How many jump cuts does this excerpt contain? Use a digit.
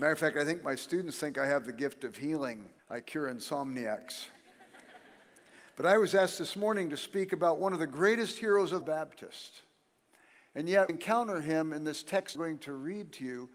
4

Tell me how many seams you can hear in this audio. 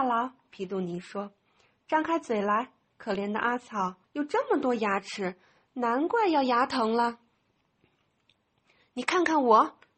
2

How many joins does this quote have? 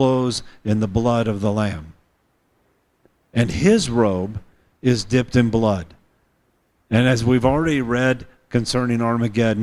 0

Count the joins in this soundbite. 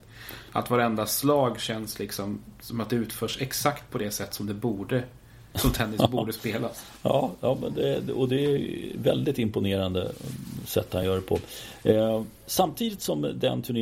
0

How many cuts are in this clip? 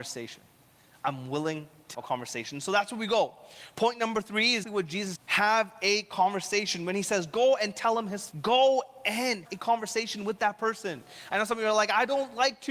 5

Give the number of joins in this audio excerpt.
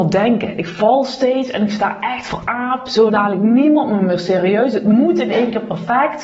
1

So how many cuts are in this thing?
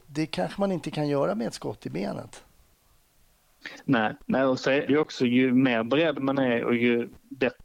1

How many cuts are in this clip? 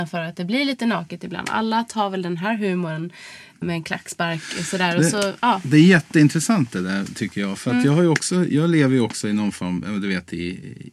1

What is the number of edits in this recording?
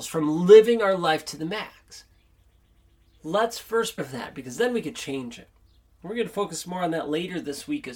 1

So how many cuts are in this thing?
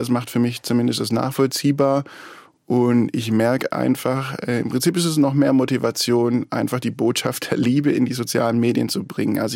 0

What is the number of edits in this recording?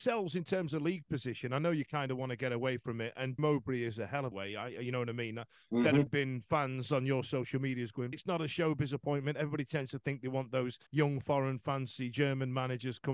5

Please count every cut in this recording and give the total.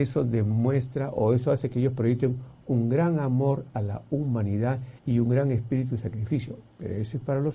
1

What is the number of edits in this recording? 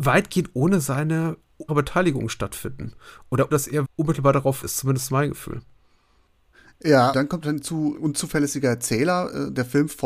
6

